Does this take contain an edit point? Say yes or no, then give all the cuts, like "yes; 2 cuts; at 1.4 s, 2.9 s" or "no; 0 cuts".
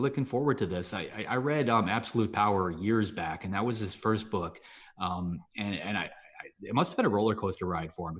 no; 0 cuts